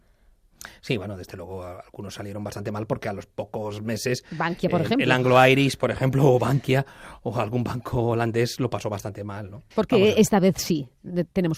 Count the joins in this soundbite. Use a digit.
1